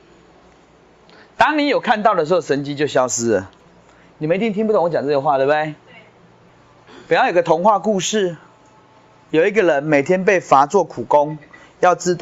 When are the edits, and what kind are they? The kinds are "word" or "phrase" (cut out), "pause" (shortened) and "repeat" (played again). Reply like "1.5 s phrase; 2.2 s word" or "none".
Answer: none